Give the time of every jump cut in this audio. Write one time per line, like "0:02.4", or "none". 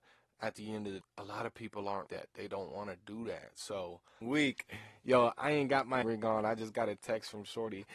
0:01.0
0:02.1
0:04.2
0:06.0